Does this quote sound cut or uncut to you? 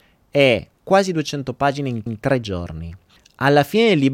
cut